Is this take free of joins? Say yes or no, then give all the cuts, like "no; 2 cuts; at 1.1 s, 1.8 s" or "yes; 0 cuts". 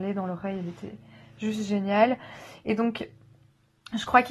yes; 0 cuts